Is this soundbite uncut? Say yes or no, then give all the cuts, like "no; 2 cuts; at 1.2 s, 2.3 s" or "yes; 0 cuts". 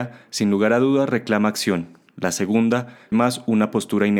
no; 1 cut; at 3.1 s